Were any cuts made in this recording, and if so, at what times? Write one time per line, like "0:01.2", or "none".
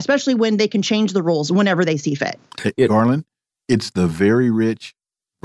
none